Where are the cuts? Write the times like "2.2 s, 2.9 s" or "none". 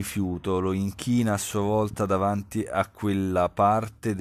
none